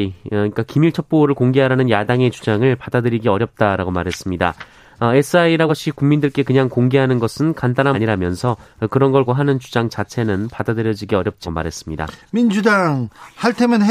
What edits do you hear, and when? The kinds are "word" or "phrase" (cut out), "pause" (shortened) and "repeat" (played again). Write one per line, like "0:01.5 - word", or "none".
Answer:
0:05.7 - word
0:07.9 - word
0:09.3 - word
0:11.4 - word